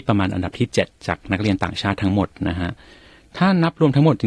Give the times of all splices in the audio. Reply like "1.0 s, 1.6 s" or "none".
none